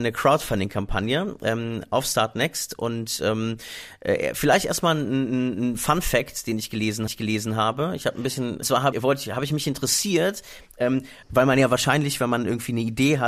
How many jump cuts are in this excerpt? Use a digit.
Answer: 4